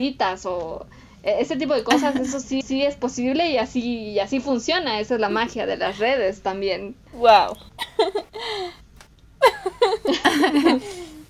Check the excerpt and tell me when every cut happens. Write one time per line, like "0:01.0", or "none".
0:02.6